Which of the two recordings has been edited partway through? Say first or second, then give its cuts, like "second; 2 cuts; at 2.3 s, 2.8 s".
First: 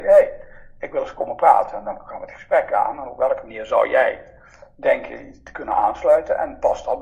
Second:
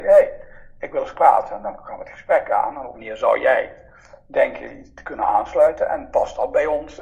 second; 2 cuts; at 1.2 s, 2.9 s